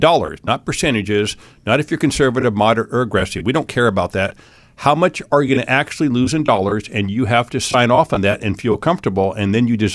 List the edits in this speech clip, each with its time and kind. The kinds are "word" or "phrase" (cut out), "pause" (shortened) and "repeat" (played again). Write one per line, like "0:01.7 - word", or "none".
none